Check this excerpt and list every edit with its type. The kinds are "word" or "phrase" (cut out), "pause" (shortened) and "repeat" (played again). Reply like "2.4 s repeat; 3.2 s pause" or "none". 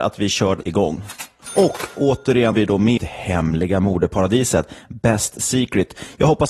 2.5 s word; 3.0 s word